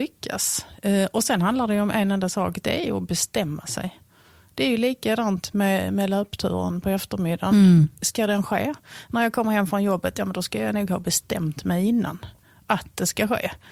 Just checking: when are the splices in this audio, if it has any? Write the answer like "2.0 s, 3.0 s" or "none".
none